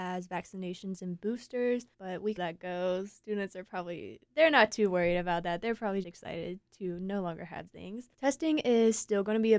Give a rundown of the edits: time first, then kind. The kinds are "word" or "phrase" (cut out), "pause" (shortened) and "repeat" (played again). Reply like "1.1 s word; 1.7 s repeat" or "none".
1.9 s pause; 2.4 s phrase; 4.3 s pause; 6.0 s word; 6.7 s pause; 7.7 s word; 8.1 s pause

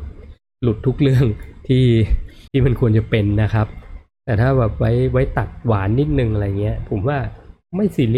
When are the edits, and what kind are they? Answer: 2.5 s pause

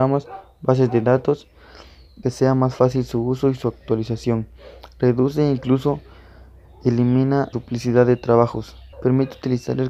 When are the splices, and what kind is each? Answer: 2.2 s phrase; 7.5 s word; 8.9 s pause

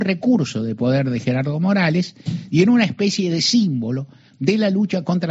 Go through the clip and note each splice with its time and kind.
none

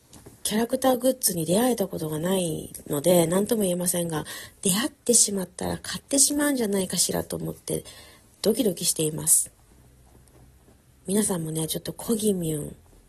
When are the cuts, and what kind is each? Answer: none

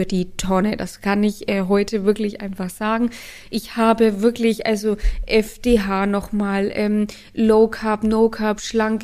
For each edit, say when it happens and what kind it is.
none

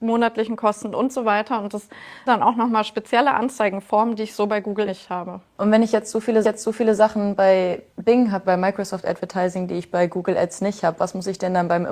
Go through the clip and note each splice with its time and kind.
2.3 s word; 4.9 s word; 5.5 s pause; 6.4 s repeat; 7.9 s pause; 8.4 s word

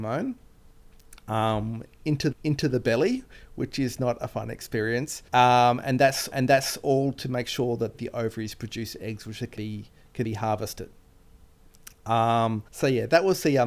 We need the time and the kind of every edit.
2.3 s repeat; 5.3 s pause; 6.3 s repeat; 7.9 s word; 9.6 s word; 10.2 s word; 12.7 s pause

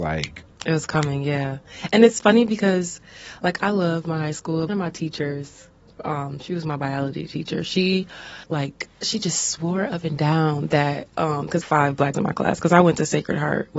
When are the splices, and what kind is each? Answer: 4.7 s phrase; 8.4 s pause; 11.6 s phrase; 12.1 s word

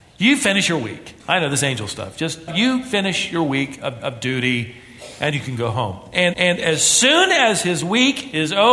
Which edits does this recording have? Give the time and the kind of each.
1.2 s pause; 2.5 s phrase; 4.0 s repeat; 5.3 s word; 6.3 s repeat

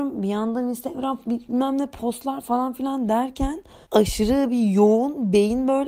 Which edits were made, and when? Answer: 3.8 s pause

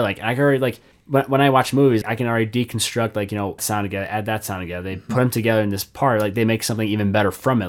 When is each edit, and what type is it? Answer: 0.9 s pause; 2.0 s word; 3.6 s phrase

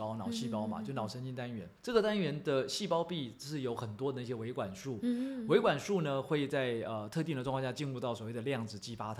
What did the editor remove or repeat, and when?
1.8 s pause

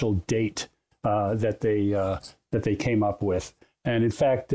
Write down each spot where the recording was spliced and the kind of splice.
none

